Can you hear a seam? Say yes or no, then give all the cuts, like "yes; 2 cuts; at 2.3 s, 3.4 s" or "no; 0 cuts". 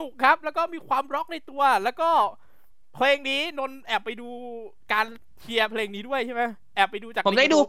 no; 0 cuts